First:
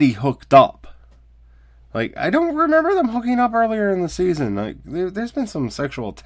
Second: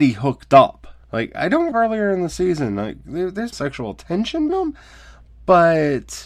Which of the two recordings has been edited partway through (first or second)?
second